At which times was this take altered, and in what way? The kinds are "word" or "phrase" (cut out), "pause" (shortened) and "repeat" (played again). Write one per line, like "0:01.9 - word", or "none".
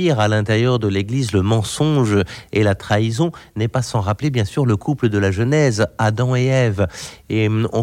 none